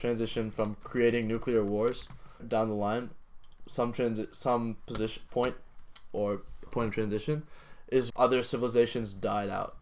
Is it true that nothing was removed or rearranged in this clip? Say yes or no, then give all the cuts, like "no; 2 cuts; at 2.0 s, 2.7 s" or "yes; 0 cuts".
no; 3 cuts; at 2.4 s, 6.7 s, 8.1 s